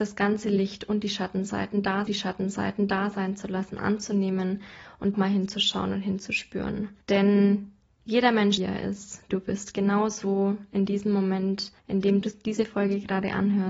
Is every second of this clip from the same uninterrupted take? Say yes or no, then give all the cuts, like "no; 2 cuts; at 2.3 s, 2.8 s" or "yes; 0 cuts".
no; 7 cuts; at 2.1 s, 5.1 s, 7.0 s, 8.6 s, 9.3 s, 11.8 s, 12.2 s